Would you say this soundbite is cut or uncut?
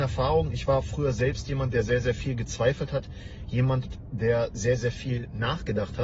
uncut